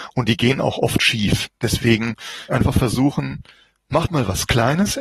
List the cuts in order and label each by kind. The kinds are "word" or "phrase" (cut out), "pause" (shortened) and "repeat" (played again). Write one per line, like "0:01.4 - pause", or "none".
0:02.5 - phrase